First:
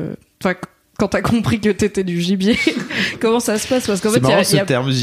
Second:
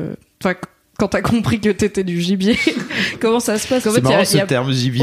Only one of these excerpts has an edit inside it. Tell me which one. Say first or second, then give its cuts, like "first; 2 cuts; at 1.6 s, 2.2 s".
second; 1 cut; at 3.8 s